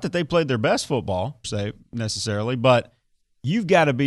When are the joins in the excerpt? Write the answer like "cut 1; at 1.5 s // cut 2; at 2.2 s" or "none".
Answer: cut 1; at 1.4 s